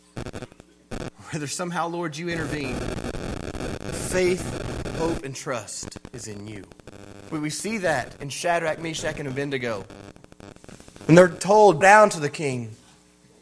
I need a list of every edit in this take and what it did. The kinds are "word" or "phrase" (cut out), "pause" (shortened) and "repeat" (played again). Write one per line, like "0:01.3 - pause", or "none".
0:03.9 - word
0:06.1 - pause
0:08.2 - pause
0:11.8 - word

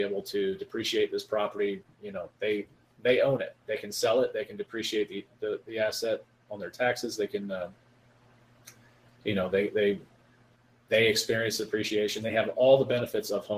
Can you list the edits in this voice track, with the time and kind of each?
none

